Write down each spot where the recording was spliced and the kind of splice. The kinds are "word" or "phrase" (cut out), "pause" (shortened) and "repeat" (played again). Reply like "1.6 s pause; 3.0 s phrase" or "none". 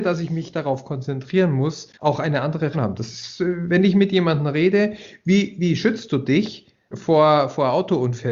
2.0 s pause; 2.7 s word; 6.9 s word